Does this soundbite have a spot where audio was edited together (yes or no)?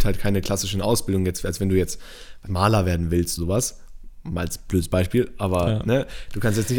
yes